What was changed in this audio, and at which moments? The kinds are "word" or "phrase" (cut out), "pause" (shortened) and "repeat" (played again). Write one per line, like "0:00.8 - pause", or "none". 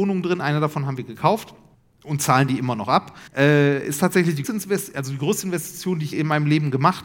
0:01.7 - pause
0:03.3 - pause
0:04.4 - word
0:06.1 - word